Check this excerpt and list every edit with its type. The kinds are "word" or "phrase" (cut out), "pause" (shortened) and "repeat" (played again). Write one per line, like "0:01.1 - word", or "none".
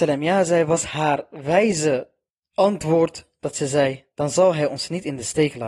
none